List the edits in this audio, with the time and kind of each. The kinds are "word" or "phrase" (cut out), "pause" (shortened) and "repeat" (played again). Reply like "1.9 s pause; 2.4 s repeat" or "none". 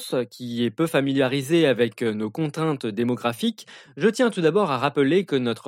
none